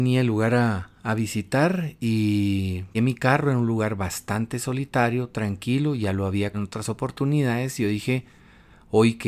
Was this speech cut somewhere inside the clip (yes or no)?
yes